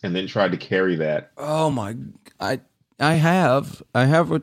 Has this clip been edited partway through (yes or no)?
no